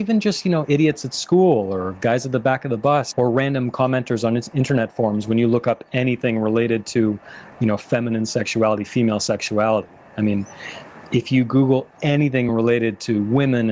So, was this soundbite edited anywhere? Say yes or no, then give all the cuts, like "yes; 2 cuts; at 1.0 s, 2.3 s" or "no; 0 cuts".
no; 0 cuts